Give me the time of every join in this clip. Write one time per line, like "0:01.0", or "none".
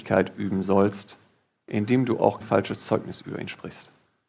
0:02.4